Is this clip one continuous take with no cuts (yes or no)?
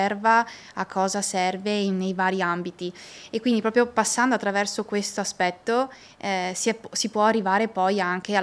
yes